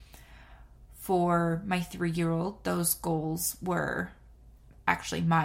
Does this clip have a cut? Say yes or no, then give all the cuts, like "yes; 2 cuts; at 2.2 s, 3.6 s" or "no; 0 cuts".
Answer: no; 0 cuts